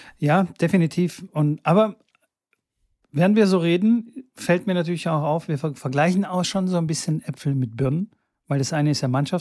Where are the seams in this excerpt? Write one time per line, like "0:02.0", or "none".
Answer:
none